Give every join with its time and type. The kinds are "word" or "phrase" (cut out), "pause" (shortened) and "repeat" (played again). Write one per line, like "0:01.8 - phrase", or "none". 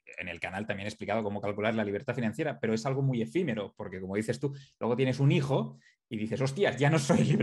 none